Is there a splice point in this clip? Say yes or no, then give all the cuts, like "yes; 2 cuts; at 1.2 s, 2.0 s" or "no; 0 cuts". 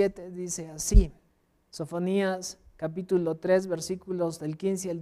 yes; 1 cut; at 1.3 s